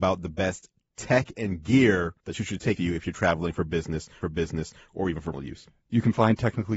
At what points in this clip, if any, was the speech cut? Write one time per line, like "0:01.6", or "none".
0:02.2
0:02.8
0:04.2
0:05.3